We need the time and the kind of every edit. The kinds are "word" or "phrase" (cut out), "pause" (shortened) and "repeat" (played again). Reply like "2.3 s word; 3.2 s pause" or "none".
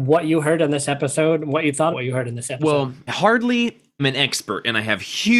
1.9 s word; 3.1 s word; 4.0 s word

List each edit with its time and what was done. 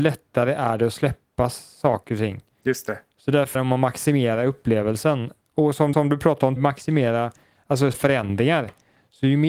3.5 s word; 5.9 s repeat; 6.6 s word; 7.9 s word

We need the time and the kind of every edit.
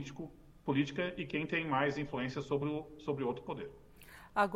none

